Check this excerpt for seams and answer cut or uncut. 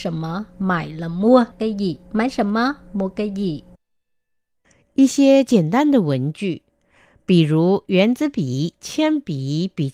cut